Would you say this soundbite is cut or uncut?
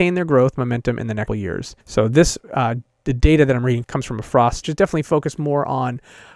cut